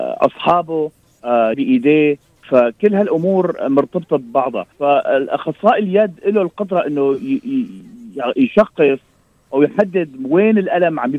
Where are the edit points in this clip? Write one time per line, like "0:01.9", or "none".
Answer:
0:01.5
0:04.7